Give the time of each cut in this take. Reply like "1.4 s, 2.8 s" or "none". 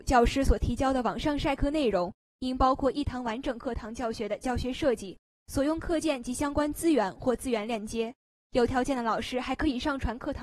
none